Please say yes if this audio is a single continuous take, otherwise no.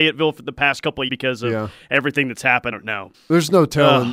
no